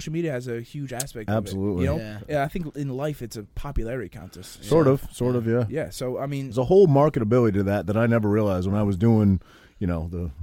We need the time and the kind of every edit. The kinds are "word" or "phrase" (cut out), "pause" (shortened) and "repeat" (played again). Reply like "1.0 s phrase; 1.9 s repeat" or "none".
none